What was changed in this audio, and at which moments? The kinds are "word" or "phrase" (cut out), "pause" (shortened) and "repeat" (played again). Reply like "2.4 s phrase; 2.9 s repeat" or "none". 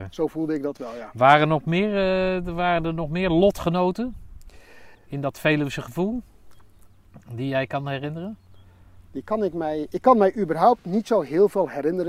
4.9 s pause